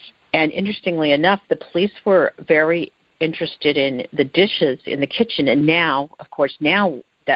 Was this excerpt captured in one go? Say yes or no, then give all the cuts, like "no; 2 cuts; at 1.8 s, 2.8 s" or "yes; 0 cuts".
yes; 0 cuts